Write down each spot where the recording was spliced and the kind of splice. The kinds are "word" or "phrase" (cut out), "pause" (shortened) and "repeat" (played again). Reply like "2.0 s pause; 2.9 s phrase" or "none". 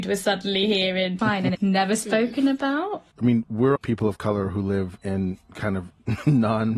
1.2 s word; 1.5 s word; 3.1 s pause; 3.8 s word